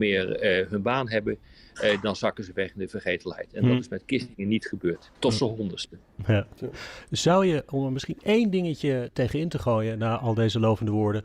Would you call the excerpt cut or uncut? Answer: uncut